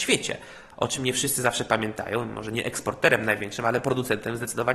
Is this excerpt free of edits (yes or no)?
yes